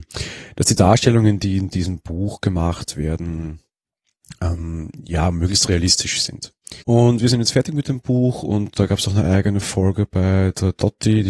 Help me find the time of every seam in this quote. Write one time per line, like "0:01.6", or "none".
0:06.8